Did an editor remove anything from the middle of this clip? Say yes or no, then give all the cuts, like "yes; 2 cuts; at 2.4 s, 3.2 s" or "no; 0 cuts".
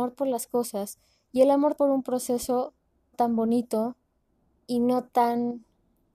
yes; 3 cuts; at 1.8 s, 3.1 s, 4.3 s